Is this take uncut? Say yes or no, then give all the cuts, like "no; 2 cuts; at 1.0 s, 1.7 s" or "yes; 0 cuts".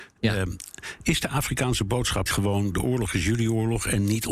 no; 1 cut; at 2.3 s